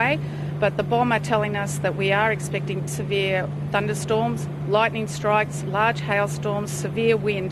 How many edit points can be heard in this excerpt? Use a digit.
1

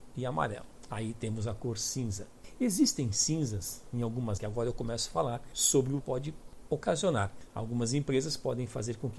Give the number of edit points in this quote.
2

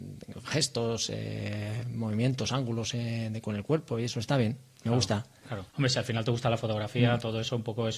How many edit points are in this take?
1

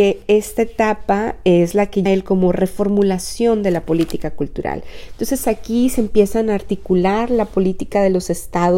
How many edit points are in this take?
1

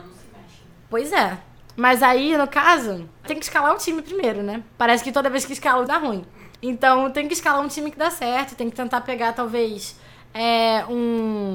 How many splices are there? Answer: 3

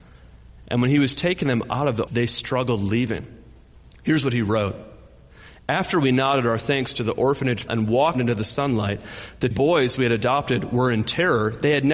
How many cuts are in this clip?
4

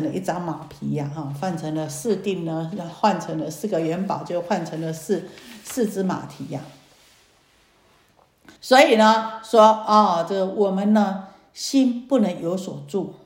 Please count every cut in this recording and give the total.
1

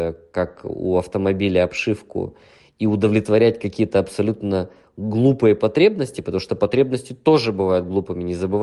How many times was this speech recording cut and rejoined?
0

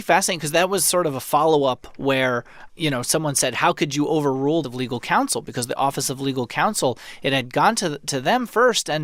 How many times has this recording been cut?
2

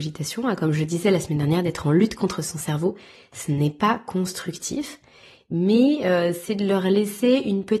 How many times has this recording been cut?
0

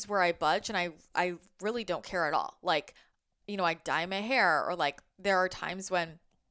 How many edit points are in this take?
0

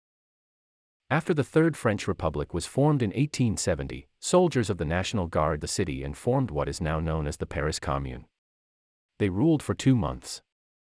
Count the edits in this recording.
1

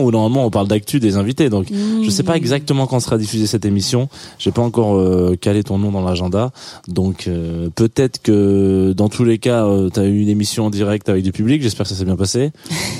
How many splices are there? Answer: 0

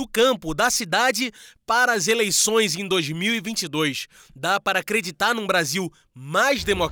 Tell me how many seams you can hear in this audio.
0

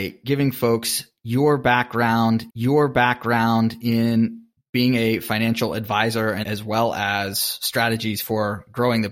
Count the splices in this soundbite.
2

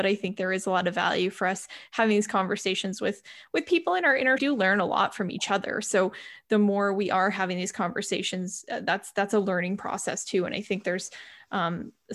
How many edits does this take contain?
1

